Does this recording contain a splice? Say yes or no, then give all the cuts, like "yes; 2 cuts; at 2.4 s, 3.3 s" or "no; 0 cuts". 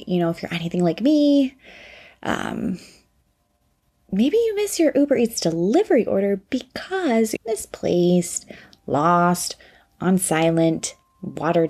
yes; 1 cut; at 7.4 s